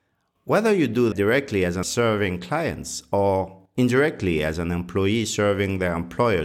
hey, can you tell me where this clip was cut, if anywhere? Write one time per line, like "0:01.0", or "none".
0:01.1
0:01.8